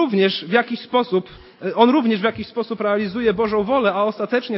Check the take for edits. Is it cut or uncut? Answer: uncut